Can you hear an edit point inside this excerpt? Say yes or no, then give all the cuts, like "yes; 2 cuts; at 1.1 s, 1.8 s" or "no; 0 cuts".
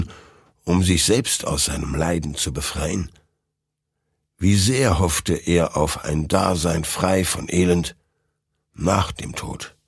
no; 0 cuts